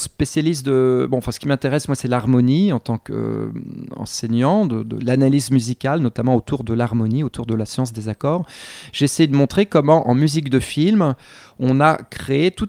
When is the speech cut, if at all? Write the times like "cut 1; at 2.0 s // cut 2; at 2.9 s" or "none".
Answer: none